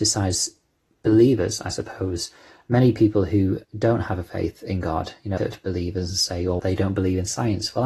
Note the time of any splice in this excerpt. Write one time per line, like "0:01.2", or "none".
0:03.6
0:05.4
0:06.6